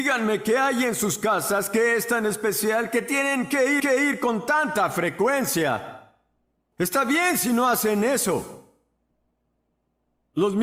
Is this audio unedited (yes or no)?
no